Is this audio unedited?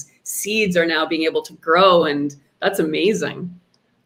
yes; 0 cuts

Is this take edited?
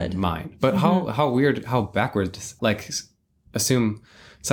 yes; 1 cut; at 2.6 s

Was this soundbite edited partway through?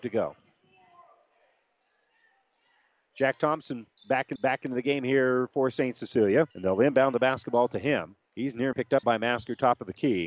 yes; 5 cuts; at 4.4 s, 6.5 s, 8.2 s, 8.7 s, 9.0 s

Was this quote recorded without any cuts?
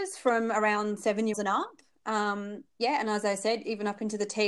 no; 2 cuts; at 1.3 s, 2.7 s

